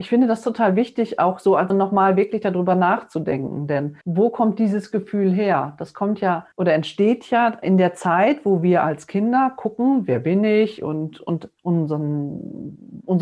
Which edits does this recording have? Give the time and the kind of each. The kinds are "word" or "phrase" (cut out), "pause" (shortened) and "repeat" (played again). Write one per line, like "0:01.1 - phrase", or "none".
0:01.7 - word
0:04.0 - pause
0:06.5 - pause
0:07.6 - word
0:11.6 - word

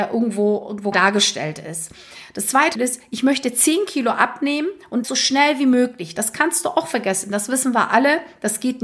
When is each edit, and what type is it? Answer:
0:00.9 - word
0:02.7 - word
0:05.0 - word

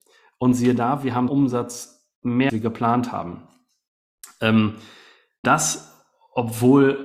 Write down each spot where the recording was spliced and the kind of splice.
0:01.3 - word
0:02.5 - phrase
0:05.4 - word

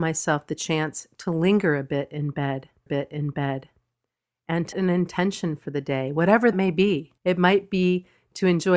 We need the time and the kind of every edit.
0:02.9 - repeat
0:04.7 - word
0:06.5 - word
0:07.2 - pause

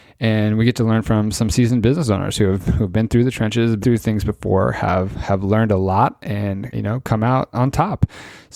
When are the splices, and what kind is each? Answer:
0:03.8 - word
0:06.7 - word
0:07.5 - word

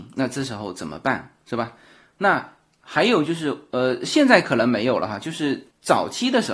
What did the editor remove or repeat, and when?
none

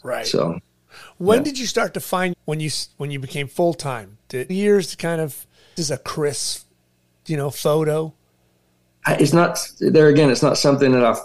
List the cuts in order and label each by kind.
0:02.3 - phrase
0:04.5 - phrase
0:05.8 - word

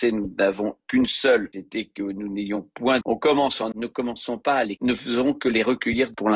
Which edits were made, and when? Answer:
0:01.5 - word
0:03.0 - word
0:03.7 - word
0:04.8 - word

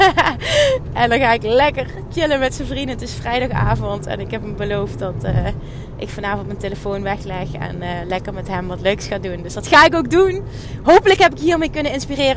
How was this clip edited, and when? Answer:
none

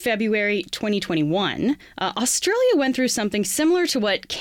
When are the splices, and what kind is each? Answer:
none

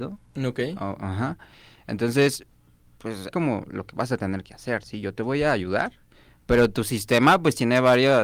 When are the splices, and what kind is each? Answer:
0:03.3 - phrase

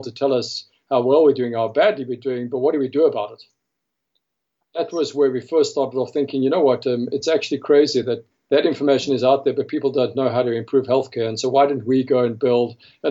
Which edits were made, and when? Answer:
none

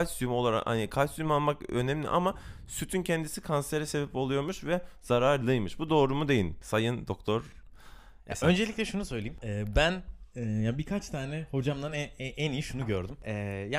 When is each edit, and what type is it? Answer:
none

